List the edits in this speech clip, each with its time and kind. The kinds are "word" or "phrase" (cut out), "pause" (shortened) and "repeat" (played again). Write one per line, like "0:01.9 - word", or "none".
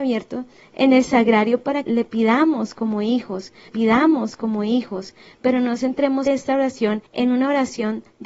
0:01.8 - word
0:03.7 - repeat
0:06.3 - word
0:07.1 - pause